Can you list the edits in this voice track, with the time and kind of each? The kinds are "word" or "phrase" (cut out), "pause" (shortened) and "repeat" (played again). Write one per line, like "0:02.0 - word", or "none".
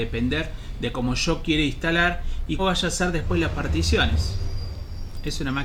0:02.6 - word